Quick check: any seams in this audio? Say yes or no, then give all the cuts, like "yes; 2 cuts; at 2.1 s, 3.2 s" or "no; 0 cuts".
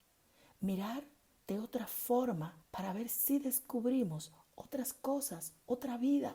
yes; 1 cut; at 2.6 s